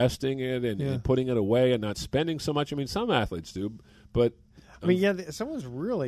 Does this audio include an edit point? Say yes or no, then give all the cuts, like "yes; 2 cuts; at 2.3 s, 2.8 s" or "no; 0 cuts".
no; 0 cuts